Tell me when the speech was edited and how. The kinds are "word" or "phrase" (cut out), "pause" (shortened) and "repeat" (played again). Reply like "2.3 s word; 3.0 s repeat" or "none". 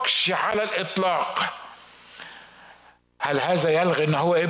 none